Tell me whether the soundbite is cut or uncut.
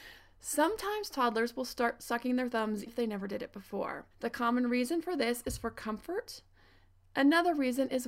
cut